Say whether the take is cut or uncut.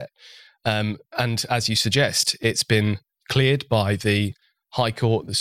uncut